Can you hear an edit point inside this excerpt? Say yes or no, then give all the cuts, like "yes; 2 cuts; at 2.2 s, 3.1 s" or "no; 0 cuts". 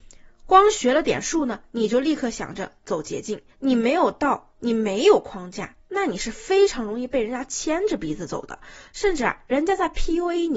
yes; 1 cut; at 3.5 s